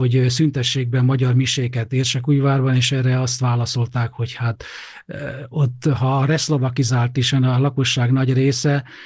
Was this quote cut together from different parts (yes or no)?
no